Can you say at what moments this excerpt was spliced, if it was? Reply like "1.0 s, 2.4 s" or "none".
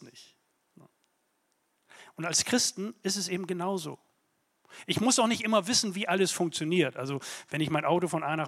none